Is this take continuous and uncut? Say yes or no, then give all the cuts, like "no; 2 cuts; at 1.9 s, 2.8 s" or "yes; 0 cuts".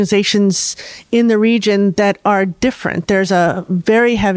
yes; 0 cuts